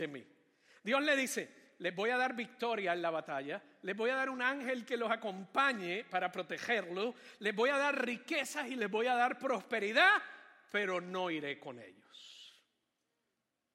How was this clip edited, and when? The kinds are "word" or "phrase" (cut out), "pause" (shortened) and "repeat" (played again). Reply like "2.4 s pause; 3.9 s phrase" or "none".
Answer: none

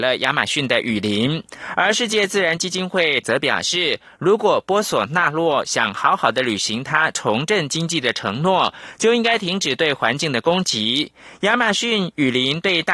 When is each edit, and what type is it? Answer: 3.2 s word

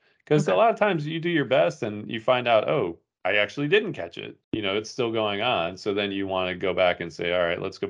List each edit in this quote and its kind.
4.4 s pause

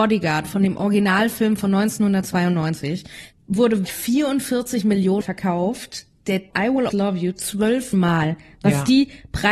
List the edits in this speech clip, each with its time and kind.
3.8 s word; 5.2 s word; 6.5 s word; 6.9 s word; 7.9 s word

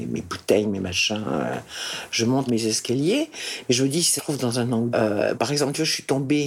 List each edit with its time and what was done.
2.5 s word; 4.2 s word; 4.9 s word; 5.3 s word

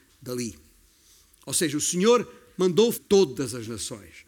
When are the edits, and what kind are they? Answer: 2.9 s phrase

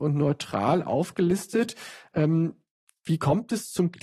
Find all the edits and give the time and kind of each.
none

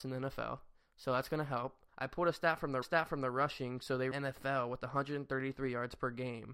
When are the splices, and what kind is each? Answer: 1.9 s pause; 2.8 s repeat; 4.1 s phrase

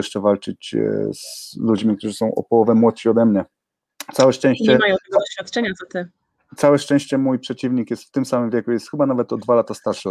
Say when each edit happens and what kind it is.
none

